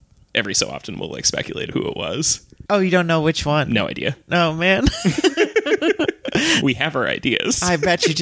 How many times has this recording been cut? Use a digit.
2